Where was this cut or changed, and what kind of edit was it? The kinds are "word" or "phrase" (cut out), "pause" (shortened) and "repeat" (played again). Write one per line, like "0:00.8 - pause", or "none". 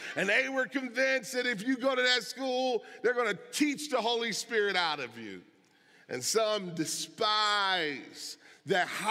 none